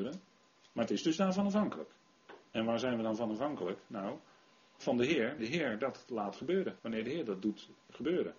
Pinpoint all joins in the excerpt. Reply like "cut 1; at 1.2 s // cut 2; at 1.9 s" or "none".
cut 1; at 2.4 s // cut 2; at 5.4 s // cut 3; at 6.8 s